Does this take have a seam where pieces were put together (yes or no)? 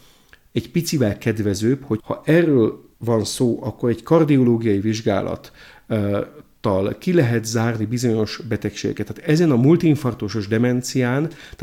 yes